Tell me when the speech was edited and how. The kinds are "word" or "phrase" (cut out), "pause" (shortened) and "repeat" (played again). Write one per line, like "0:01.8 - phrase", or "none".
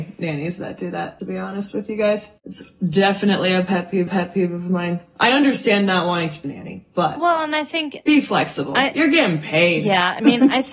0:01.2 - word
0:02.4 - pause
0:04.1 - repeat
0:06.4 - phrase